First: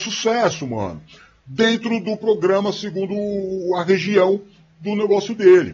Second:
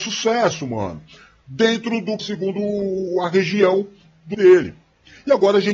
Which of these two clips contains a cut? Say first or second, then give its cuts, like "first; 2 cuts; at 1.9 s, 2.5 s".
second; 2 cuts; at 2.2 s, 4.3 s